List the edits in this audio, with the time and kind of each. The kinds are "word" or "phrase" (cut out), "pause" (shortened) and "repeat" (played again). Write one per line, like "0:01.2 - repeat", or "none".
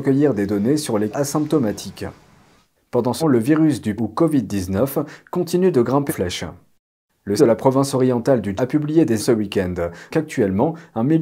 0:01.1 - word
0:03.2 - word
0:04.0 - word
0:06.1 - word
0:07.4 - word
0:08.6 - word
0:09.2 - word
0:10.1 - word